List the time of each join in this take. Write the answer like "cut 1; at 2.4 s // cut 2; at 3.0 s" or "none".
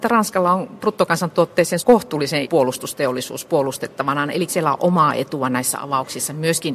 cut 1; at 1.8 s // cut 2; at 2.4 s // cut 3; at 4.5 s

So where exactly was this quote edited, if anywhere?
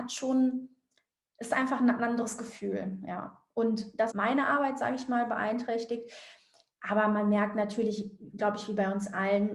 cut 1; at 4.1 s

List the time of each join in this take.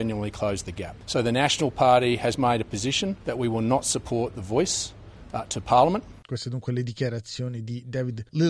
cut 1; at 6.2 s

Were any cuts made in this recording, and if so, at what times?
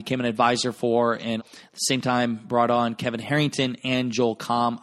cut 1; at 1.4 s

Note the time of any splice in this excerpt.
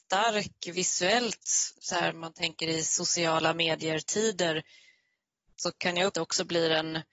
cut 1; at 6.1 s

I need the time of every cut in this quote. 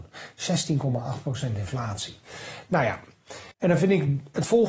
cut 1; at 3.5 s

